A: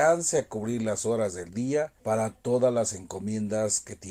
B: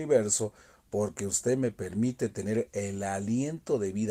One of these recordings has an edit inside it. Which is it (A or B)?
A